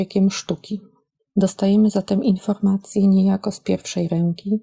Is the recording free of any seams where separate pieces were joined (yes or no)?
yes